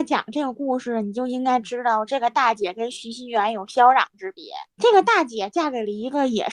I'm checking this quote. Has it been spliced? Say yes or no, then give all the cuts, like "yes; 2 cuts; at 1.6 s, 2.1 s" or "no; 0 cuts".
yes; 1 cut; at 4.7 s